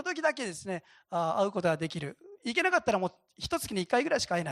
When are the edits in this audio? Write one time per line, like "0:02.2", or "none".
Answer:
none

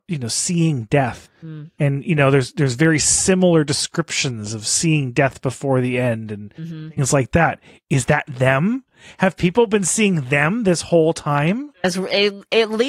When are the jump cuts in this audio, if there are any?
none

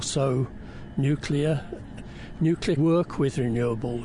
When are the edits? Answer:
0:02.8

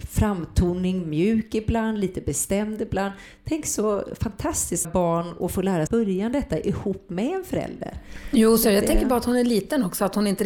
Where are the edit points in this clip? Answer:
0:04.8
0:05.9

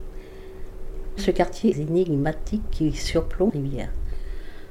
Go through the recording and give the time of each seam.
0:01.2
0:01.7
0:03.5

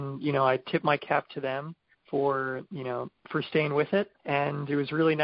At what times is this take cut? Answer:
0:01.9
0:03.2
0:04.2

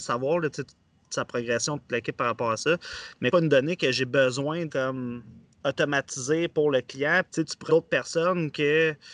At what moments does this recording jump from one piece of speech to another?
0:03.3
0:04.7
0:07.3
0:07.7

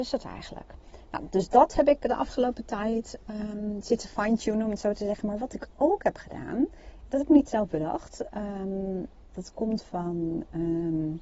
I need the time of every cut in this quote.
none

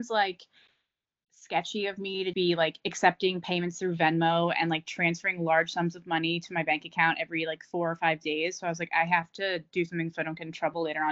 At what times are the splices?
0:02.3

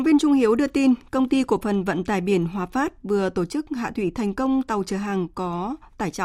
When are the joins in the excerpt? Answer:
none

